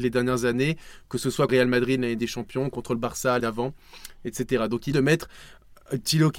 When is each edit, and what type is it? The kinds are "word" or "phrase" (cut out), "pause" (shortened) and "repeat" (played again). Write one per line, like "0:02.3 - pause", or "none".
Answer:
0:01.5 - phrase
0:02.2 - phrase
0:03.4 - word
0:04.9 - phrase

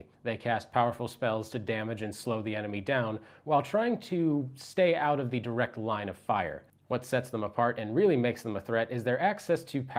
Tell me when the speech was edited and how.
none

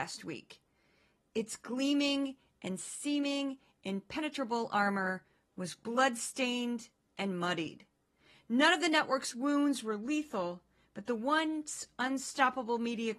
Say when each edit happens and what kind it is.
none

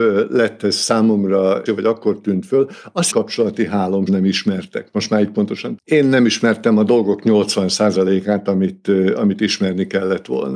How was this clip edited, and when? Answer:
0:01.7 - word
0:03.1 - phrase
0:04.1 - word
0:05.8 - word

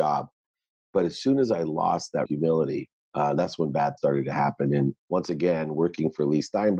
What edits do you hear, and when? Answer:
0:02.3 - word
0:02.9 - pause
0:04.0 - word
0:05.0 - pause

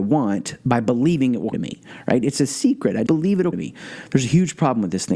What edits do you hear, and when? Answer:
0:01.5 - word
0:03.1 - word
0:03.5 - word

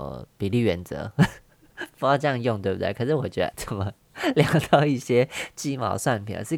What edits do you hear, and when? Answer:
0:03.5 - word

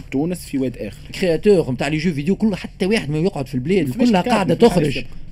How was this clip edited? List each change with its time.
0:01.1 - phrase

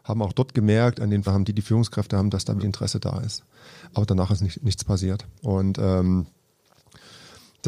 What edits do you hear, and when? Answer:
0:01.3 - phrase
0:02.6 - word
0:05.4 - pause

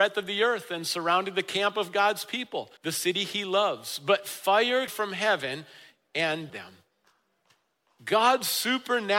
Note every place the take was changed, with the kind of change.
0:02.8 - pause
0:04.9 - phrase
0:06.5 - word

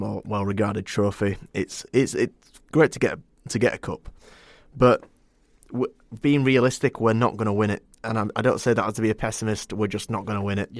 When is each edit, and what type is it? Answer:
0:02.1 - word

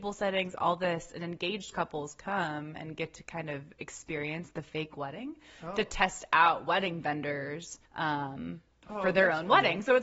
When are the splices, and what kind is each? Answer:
0:07.9 - pause

